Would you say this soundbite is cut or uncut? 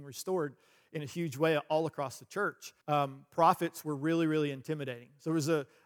cut